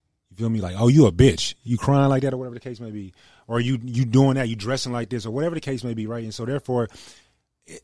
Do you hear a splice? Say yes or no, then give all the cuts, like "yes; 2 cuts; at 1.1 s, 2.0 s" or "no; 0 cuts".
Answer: no; 0 cuts